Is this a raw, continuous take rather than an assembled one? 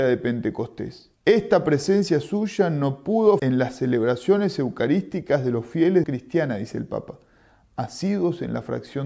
no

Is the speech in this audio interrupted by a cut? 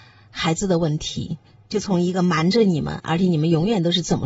no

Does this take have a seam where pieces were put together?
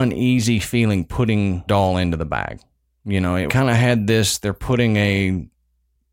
yes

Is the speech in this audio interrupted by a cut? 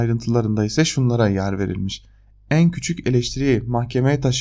no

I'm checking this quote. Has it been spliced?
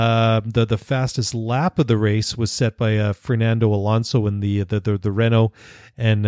no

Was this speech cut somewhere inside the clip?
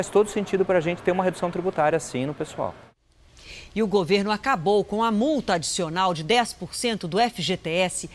no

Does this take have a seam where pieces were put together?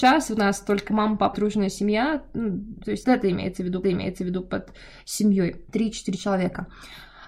yes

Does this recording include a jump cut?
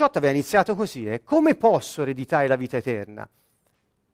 no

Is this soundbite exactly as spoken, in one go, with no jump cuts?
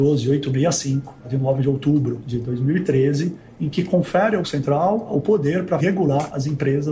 no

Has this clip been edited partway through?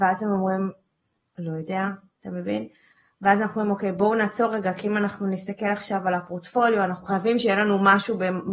no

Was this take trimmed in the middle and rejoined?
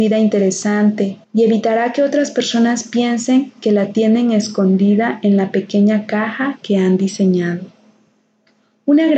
yes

